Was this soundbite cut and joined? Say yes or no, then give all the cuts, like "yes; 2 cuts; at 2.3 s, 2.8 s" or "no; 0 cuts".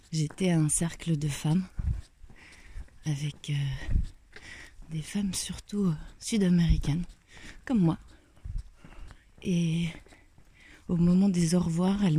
no; 0 cuts